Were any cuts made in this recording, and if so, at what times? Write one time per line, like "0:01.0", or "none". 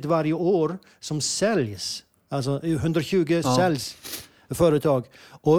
0:03.4